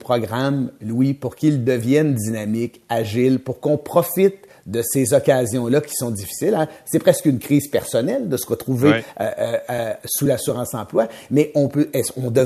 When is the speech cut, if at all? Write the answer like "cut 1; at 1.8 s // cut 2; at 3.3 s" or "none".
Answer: none